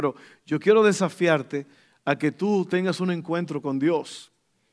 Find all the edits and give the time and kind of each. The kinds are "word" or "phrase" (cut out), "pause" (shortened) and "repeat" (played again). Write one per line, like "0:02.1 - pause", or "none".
none